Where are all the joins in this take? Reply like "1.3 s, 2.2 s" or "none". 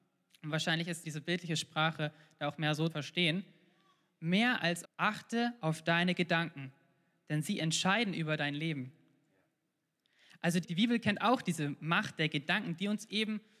1.0 s, 2.9 s, 4.8 s, 10.6 s